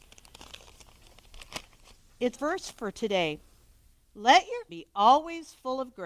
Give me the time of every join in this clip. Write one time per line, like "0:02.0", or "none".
0:02.3
0:03.9
0:04.7